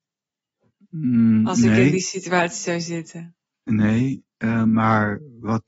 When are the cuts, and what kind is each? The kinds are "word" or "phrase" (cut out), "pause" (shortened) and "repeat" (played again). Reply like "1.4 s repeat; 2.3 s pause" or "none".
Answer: none